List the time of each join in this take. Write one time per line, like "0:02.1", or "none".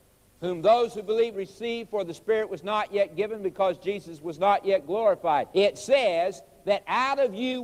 0:01.3
0:05.5

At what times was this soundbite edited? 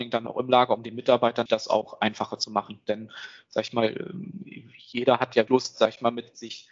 0:01.5
0:05.5

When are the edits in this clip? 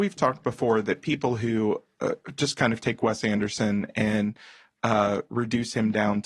none

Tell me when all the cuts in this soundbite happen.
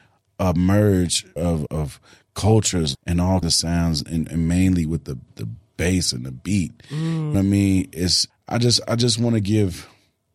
0:01.4
0:01.7
0:02.9
0:03.4
0:04.3
0:05.3
0:07.3
0:08.3

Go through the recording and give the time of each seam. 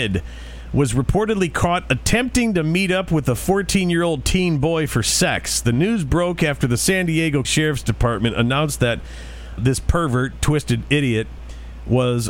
0:07.4
0:09.6

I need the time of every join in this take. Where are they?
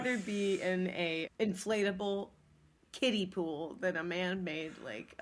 0:01.3

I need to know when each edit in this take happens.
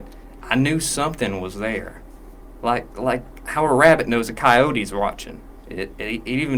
none

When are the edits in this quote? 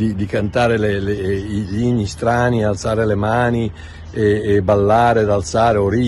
none

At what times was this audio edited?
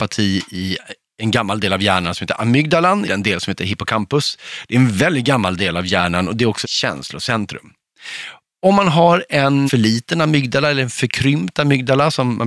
0:03.0
0:06.6
0:09.7

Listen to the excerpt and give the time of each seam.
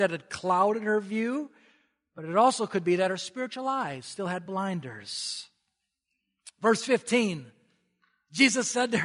none

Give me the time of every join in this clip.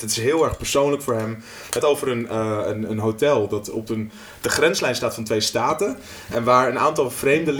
0:01.8
0:02.9

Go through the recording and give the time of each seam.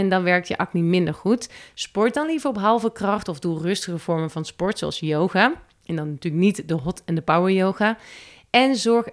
none

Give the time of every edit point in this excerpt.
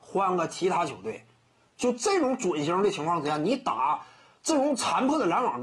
none

